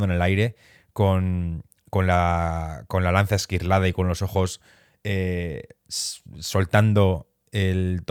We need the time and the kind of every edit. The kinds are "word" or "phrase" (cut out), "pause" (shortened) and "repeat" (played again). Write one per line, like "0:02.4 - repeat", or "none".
none